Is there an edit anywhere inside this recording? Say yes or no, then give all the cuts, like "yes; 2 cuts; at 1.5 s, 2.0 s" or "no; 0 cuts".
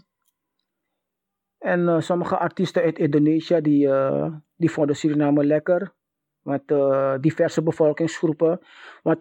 no; 0 cuts